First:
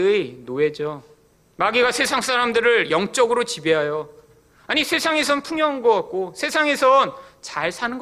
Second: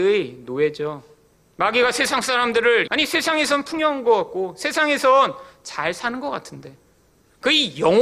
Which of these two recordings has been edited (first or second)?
second